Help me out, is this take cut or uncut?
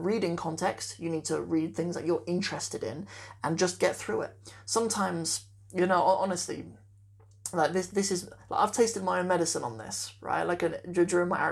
uncut